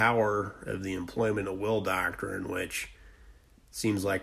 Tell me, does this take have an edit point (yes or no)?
no